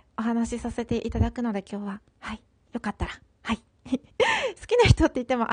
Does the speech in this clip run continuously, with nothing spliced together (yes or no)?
no